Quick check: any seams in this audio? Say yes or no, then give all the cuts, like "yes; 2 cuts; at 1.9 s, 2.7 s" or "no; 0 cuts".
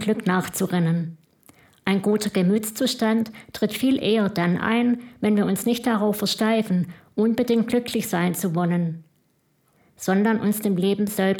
no; 0 cuts